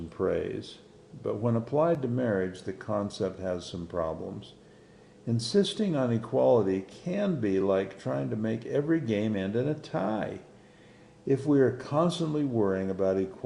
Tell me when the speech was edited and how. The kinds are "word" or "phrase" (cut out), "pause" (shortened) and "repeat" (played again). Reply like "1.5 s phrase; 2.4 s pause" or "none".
none

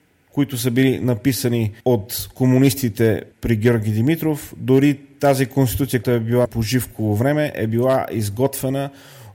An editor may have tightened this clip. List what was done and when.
1.8 s pause; 3.3 s pause; 6.0 s word; 6.5 s word

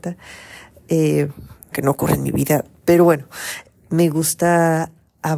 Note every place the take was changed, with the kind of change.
1.7 s word; 2.8 s word

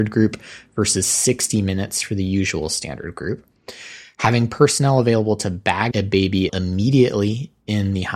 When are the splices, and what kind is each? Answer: 5.9 s word; 6.5 s word

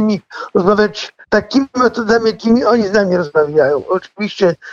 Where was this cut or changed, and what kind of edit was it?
1.2 s pause

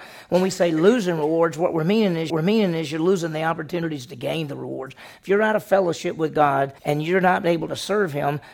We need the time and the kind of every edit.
2.3 s repeat; 6.8 s pause

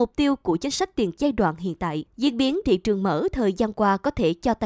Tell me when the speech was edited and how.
1.1 s word; 2.1 s pause; 2.6 s word

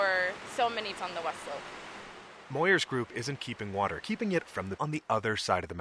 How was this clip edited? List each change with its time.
0.9 s word; 3.4 s word; 4.0 s phrase; 4.4 s word; 4.8 s word

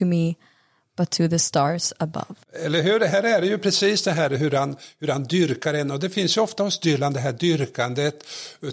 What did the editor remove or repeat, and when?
2.4 s pause

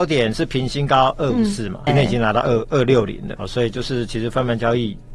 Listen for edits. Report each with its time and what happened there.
1.9 s word; 3.4 s word

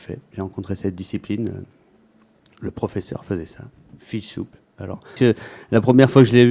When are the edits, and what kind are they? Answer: 4.0 s word; 5.2 s phrase

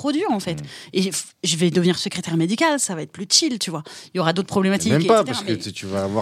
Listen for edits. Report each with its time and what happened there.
none

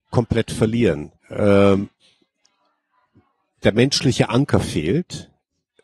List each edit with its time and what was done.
1.2 s pause

